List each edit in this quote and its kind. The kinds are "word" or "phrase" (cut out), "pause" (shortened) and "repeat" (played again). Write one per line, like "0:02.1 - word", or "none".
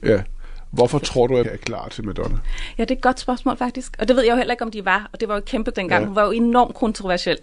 0:01.4 - word
0:05.7 - word

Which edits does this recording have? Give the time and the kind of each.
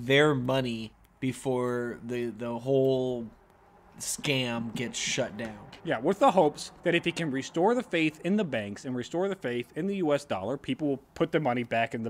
0:05.8 - pause
0:06.8 - pause

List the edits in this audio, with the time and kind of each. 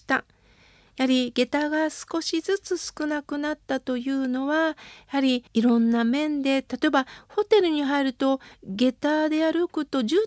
0:05.5 - pause

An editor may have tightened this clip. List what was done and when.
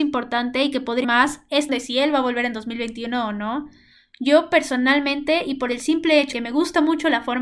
0:01.0 - word
0:01.7 - word
0:06.3 - word

